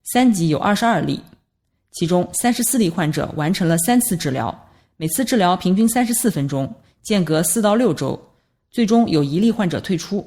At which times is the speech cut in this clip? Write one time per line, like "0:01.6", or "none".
none